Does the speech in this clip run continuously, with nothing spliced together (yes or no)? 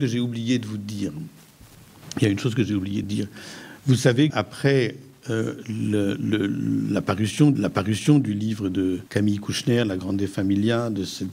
no